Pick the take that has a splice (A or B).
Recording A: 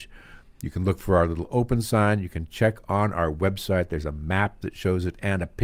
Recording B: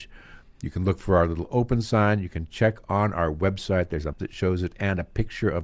B